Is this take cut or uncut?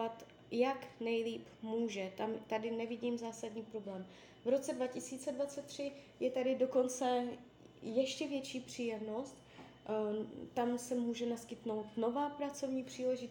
uncut